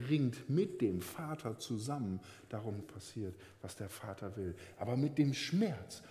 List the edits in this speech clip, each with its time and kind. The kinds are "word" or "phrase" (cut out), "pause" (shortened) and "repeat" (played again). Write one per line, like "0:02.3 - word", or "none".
0:02.8 - phrase